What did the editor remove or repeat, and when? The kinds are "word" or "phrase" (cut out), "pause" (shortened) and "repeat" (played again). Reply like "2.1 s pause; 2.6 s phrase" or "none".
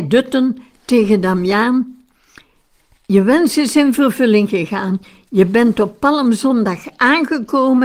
none